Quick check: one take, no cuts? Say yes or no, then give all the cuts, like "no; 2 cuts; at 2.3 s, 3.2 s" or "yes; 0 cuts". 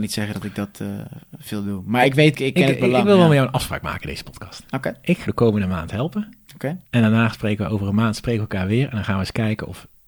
no; 3 cuts; at 2.3 s, 5.3 s, 6.8 s